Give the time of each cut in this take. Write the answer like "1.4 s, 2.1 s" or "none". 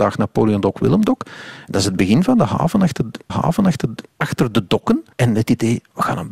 3.3 s, 5.1 s